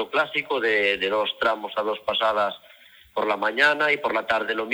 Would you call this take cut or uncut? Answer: uncut